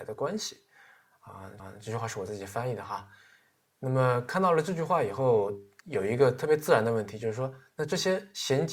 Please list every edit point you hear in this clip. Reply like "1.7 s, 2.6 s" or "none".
1.6 s